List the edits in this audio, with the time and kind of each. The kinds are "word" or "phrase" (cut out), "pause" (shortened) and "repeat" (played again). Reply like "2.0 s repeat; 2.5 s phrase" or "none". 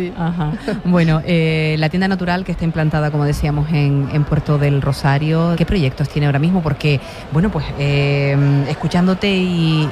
5.6 s word